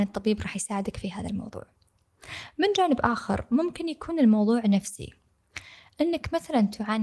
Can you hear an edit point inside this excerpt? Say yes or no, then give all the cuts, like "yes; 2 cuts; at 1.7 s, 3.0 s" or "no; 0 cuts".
no; 0 cuts